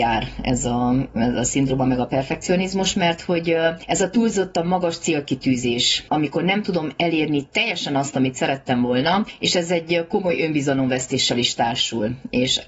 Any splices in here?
yes; 1 cut; at 6.1 s

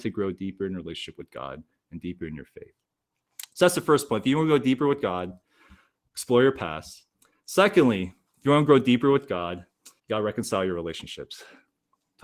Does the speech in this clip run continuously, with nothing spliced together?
no; 1 cut; at 10.0 s

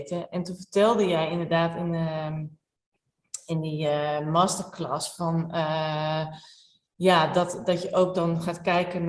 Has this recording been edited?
no; 0 cuts

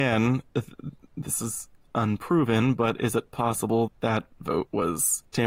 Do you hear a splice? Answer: yes; 1 cut; at 3.9 s

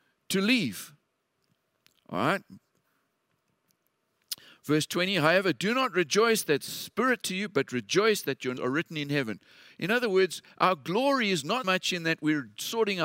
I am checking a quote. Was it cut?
yes; 3 cuts; at 7.2 s, 8.6 s, 11.6 s

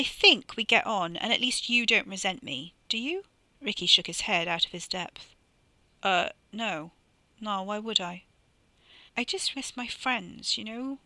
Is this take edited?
yes; 3 cuts; at 3.5 s, 9.1 s, 9.5 s

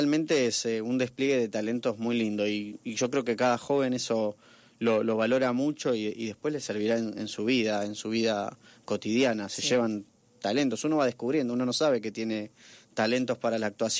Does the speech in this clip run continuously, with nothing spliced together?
yes; 0 cuts

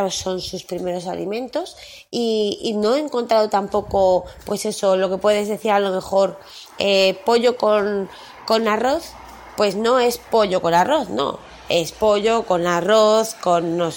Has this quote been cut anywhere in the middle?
no; 0 cuts

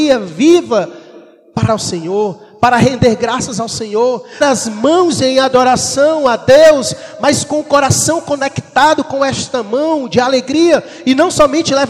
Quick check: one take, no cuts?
no; 2 cuts; at 1.7 s, 4.4 s

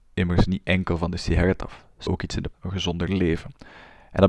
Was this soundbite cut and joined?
yes; 2 cuts; at 2.1 s, 2.5 s

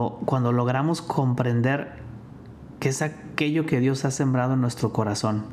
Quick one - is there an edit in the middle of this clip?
no; 0 cuts

